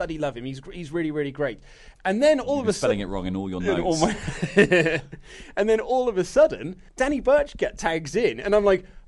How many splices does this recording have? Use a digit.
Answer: 1